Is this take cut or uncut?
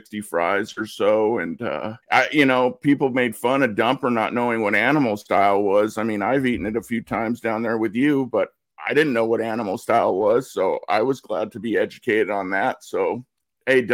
cut